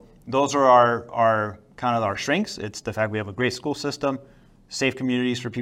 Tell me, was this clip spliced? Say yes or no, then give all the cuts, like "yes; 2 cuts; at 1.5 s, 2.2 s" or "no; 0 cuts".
no; 0 cuts